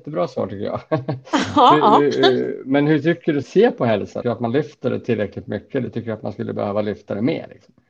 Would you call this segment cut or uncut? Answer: cut